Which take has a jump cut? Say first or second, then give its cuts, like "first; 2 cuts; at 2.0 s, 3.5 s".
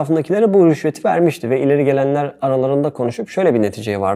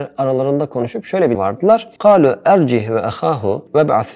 second; 1 cut; at 1.3 s